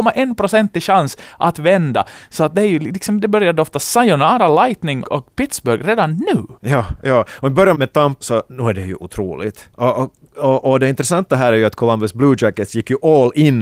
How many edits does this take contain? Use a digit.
5